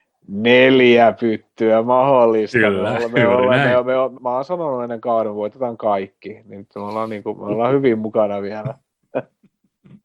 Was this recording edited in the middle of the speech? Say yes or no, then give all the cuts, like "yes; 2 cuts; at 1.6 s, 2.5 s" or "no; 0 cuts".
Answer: yes; 1 cut; at 4.1 s